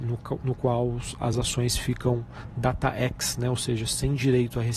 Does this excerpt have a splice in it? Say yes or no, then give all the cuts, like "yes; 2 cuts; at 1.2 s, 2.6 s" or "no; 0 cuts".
no; 0 cuts